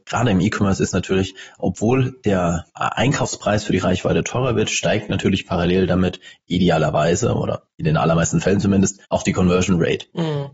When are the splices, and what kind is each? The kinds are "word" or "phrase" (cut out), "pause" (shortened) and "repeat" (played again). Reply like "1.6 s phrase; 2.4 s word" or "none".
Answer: 1.6 s word; 2.7 s pause; 9.0 s pause